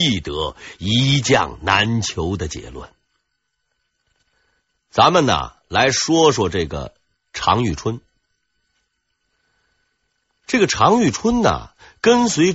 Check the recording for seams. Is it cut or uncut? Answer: uncut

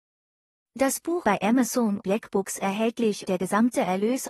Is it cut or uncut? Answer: cut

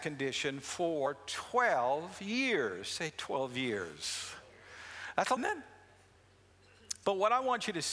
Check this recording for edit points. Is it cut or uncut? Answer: cut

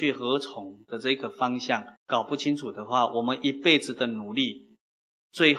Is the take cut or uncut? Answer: cut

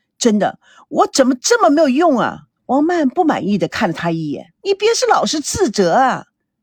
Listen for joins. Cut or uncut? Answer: cut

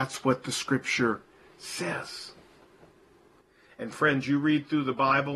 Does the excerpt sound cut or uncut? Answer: uncut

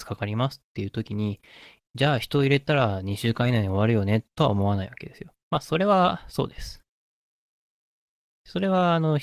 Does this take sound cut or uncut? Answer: cut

